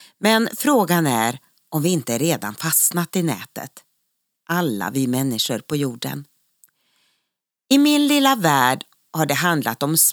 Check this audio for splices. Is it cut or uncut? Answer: uncut